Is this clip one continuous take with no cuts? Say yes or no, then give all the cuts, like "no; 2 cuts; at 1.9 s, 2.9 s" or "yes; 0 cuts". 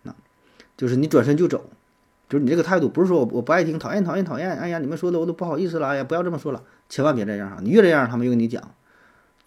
yes; 0 cuts